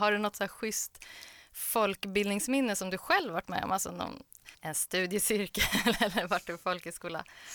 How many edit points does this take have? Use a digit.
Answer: 1